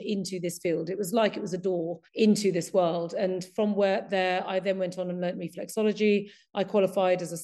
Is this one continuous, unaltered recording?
no; 1 cut; at 2.1 s

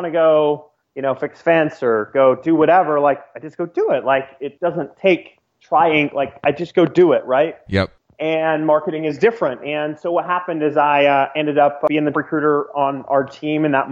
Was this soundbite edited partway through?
yes; 1 cut; at 12.1 s

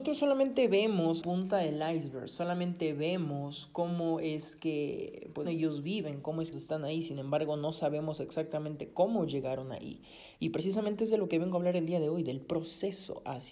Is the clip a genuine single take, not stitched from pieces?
no; 3 cuts; at 1.2 s, 5.5 s, 6.5 s

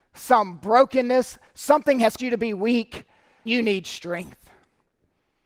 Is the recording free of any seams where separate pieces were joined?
no; 2 cuts; at 2.2 s, 3.5 s

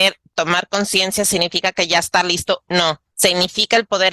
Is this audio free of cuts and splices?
no; 1 cut; at 3.1 s

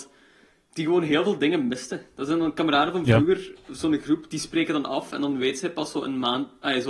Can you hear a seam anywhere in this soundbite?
no; 0 cuts

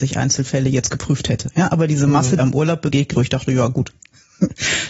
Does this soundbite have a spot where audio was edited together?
yes; 2 cuts; at 2.4 s, 3.1 s

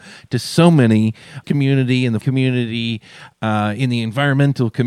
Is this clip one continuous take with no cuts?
no; 2 cuts; at 1.4 s, 2.2 s

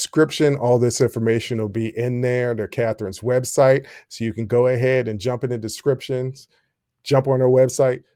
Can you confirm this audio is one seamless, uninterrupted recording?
yes; 0 cuts

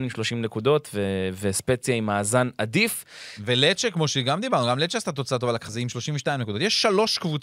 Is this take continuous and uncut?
no; 1 cut; at 5.7 s

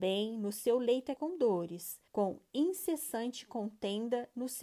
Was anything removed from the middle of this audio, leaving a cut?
yes; 2 cuts; at 1.2 s, 2.1 s

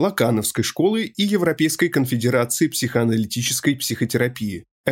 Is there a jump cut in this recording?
no; 0 cuts

